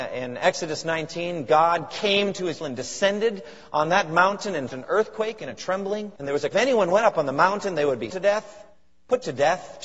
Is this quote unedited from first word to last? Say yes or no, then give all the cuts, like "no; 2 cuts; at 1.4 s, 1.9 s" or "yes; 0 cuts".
no; 5 cuts; at 2.6 s, 4.7 s, 6.2 s, 6.5 s, 8.1 s